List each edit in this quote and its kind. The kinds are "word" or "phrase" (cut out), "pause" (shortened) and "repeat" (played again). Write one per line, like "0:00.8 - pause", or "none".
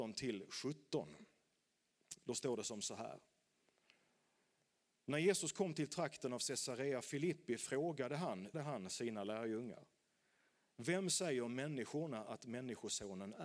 0:08.5 - word